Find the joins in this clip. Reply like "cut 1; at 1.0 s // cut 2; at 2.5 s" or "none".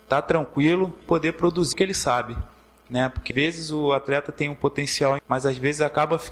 cut 1; at 1.0 s // cut 2; at 1.7 s // cut 3; at 3.3 s // cut 4; at 5.2 s